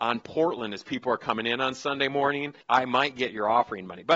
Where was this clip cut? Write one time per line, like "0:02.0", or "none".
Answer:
0:02.6